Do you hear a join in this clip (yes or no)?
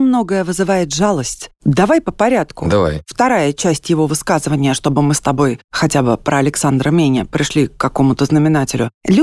no